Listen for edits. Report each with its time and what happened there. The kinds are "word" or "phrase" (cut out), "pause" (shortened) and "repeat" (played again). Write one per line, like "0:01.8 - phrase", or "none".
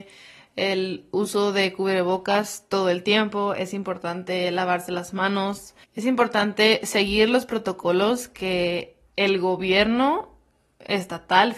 0:05.8 - pause
0:09.1 - pause